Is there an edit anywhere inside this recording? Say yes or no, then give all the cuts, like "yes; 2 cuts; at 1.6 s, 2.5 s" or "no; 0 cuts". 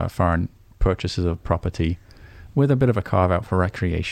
no; 0 cuts